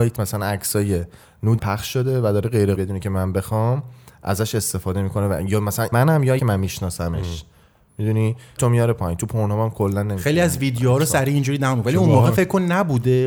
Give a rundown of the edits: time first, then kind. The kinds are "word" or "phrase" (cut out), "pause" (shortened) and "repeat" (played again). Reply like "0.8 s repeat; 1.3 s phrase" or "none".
1.6 s word; 2.8 s word; 5.9 s word; 6.4 s word; 8.6 s word